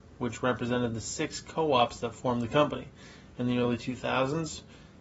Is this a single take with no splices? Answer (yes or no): yes